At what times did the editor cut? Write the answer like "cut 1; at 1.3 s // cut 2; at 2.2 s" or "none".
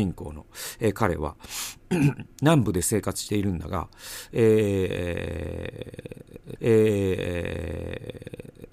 cut 1; at 6.6 s